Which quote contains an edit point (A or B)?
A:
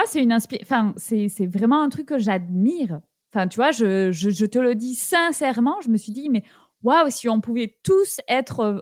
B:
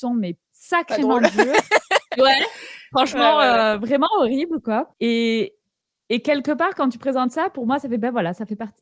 B